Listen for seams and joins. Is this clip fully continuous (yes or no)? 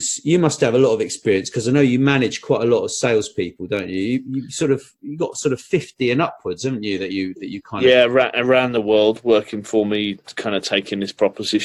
yes